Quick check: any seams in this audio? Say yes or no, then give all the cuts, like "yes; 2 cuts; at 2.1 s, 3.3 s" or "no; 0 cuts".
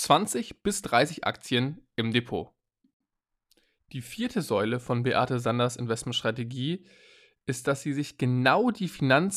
no; 0 cuts